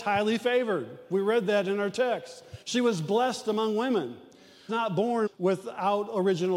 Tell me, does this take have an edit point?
yes; 3 cuts; at 2.6 s, 4.7 s, 5.3 s

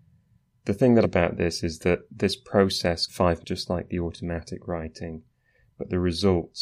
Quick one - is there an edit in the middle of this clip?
yes; 3 cuts; at 1.0 s, 3.1 s, 3.4 s

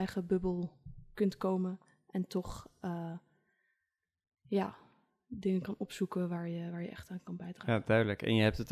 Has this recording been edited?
no; 0 cuts

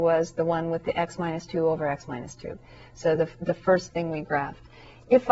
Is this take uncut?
yes; 0 cuts

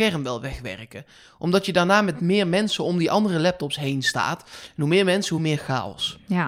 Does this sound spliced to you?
no; 0 cuts

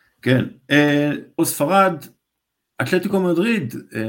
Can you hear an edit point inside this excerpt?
yes; 1 cut; at 1.4 s

